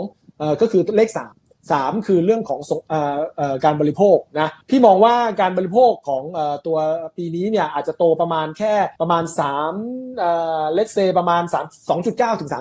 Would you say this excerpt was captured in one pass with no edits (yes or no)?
no